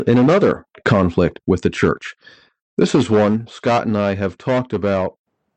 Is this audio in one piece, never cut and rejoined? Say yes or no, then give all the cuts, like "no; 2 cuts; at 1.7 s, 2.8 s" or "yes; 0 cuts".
yes; 0 cuts